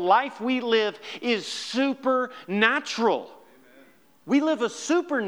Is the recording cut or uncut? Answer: uncut